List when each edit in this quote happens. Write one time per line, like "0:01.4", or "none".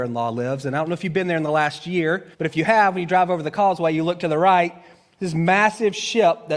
0:02.3